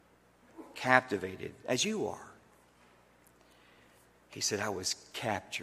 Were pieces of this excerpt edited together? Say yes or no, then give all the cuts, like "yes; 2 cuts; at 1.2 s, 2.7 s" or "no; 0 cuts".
no; 0 cuts